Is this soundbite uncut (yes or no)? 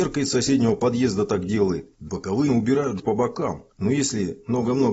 no